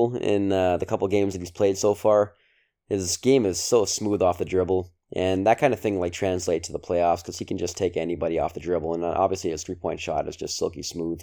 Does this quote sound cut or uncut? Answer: cut